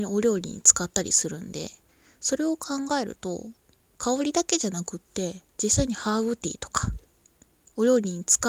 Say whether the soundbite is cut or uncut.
cut